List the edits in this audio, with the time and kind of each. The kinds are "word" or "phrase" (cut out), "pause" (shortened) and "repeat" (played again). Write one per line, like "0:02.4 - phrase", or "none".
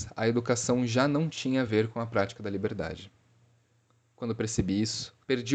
none

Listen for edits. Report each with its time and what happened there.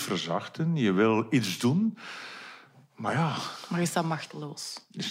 none

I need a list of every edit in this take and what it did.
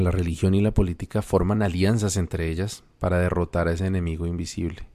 none

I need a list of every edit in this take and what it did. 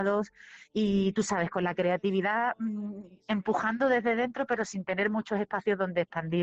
none

